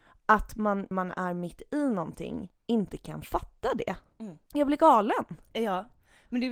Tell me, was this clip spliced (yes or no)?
yes